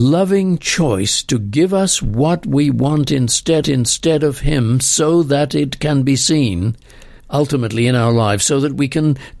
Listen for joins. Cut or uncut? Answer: cut